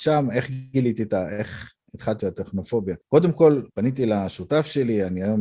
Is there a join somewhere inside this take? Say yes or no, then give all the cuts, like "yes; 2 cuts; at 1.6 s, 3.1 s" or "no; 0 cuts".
yes; 3 cuts; at 2.2 s, 3.0 s, 3.7 s